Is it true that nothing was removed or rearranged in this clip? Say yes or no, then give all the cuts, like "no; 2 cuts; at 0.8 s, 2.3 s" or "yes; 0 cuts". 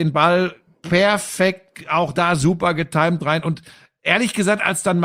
yes; 0 cuts